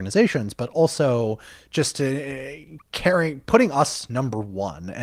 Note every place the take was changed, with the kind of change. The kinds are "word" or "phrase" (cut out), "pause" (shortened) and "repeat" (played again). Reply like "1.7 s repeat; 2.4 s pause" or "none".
2.8 s pause